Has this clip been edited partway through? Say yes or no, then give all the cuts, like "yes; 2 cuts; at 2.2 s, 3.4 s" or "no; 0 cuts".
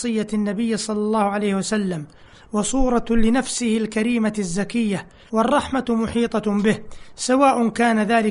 yes; 1 cut; at 5.3 s